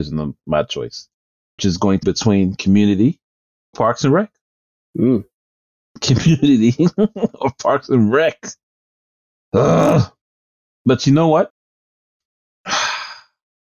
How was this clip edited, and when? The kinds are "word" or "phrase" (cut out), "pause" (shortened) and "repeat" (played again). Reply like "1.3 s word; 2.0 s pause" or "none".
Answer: 1.6 s word; 2.0 s word; 3.7 s word